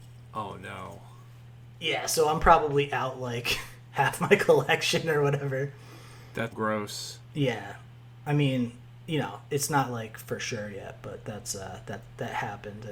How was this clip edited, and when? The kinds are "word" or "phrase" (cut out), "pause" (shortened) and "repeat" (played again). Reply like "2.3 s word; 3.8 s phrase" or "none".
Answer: 6.5 s word

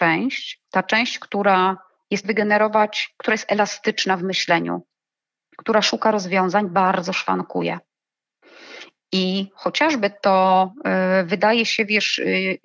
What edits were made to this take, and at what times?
2.2 s phrase

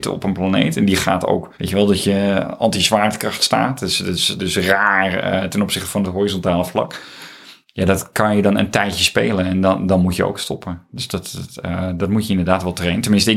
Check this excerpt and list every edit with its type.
1.5 s pause

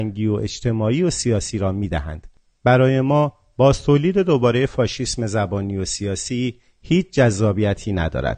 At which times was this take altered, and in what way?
none

